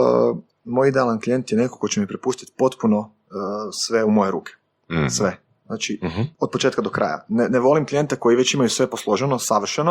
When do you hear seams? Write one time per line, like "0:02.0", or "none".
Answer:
0:06.3